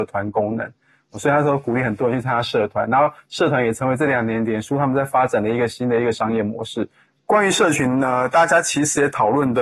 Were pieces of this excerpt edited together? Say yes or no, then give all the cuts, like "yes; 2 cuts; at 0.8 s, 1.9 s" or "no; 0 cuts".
no; 0 cuts